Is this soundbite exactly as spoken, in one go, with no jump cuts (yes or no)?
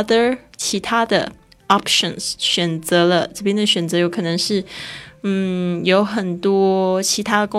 yes